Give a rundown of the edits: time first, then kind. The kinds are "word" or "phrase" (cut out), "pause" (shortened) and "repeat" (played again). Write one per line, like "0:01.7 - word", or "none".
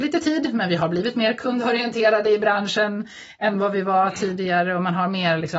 none